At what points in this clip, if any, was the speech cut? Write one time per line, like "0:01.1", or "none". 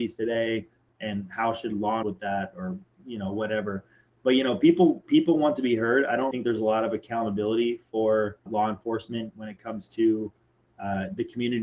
0:02.0
0:04.2
0:06.3
0:08.5